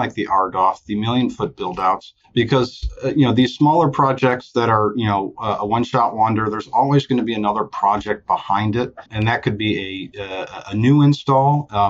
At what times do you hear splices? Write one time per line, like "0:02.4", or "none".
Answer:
0:02.2
0:09.1